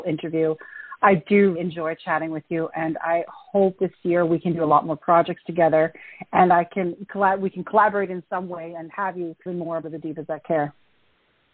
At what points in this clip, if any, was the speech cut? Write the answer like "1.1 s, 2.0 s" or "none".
1.6 s, 3.8 s, 9.5 s, 9.8 s